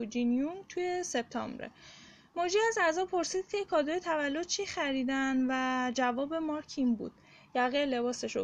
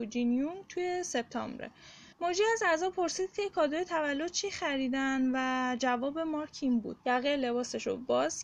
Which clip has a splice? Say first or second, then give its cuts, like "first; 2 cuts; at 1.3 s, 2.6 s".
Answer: second; 2 cuts; at 2.1 s, 7.0 s